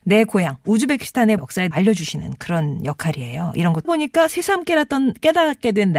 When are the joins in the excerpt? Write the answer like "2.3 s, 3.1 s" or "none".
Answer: 1.4 s, 1.7 s, 3.8 s